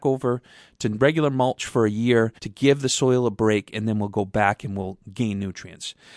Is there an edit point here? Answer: yes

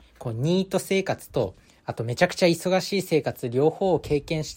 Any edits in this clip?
yes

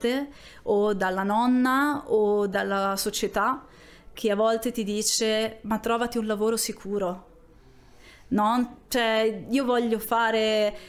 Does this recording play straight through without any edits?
yes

